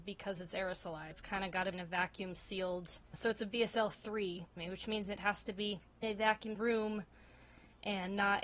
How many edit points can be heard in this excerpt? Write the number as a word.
six